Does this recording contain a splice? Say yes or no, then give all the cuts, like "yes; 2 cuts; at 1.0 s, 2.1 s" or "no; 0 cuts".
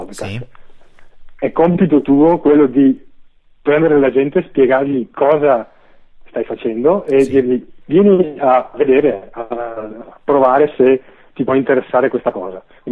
no; 0 cuts